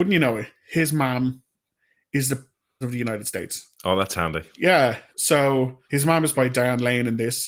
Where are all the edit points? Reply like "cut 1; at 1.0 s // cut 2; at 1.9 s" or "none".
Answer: cut 1; at 2.8 s // cut 2; at 5.8 s // cut 3; at 6.3 s